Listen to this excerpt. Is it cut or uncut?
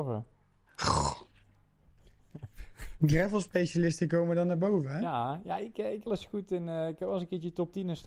cut